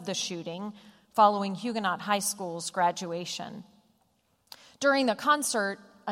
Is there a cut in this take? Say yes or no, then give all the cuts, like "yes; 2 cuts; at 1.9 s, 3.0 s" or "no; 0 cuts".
no; 0 cuts